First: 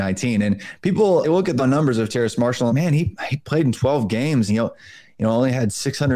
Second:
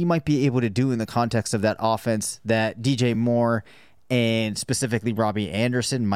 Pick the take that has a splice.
first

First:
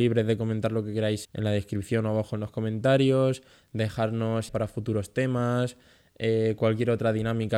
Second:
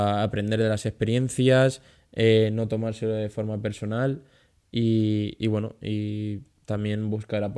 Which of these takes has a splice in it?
first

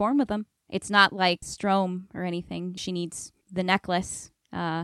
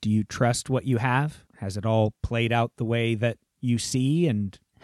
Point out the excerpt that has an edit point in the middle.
first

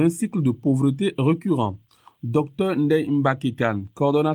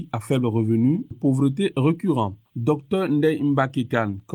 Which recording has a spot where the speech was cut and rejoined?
second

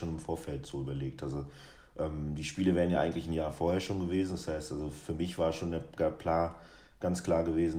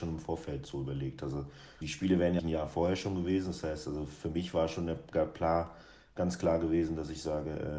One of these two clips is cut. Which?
second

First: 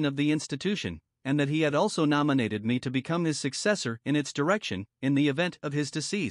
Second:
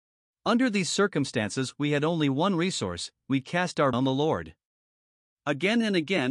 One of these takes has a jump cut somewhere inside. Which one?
second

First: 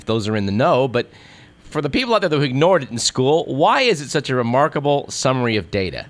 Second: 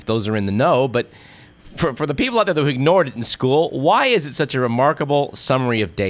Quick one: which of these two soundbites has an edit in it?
first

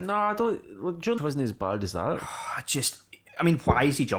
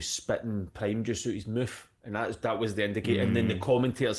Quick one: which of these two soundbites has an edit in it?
first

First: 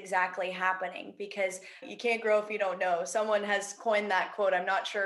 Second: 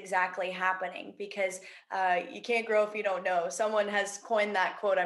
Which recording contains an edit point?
first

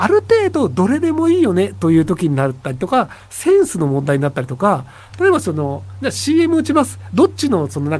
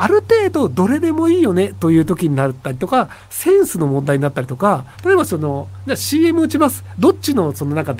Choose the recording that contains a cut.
second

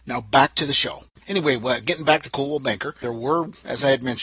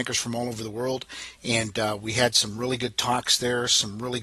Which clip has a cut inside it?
first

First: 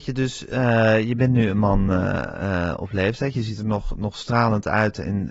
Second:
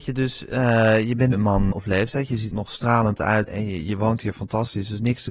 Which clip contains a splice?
second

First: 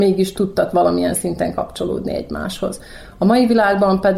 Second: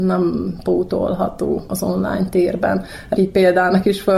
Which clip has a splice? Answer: second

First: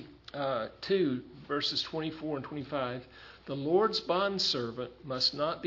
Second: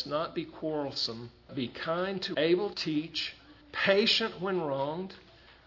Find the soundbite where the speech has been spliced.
second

